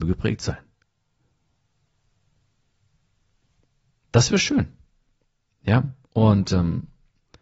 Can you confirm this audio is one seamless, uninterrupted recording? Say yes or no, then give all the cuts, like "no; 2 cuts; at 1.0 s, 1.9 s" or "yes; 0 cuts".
yes; 0 cuts